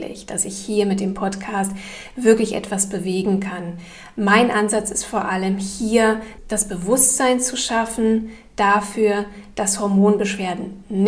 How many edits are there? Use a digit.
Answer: 0